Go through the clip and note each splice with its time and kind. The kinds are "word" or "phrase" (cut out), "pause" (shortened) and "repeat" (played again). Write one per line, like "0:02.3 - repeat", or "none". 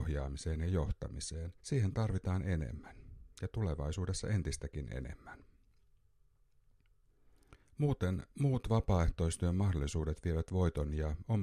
0:01.6 - pause
0:07.6 - pause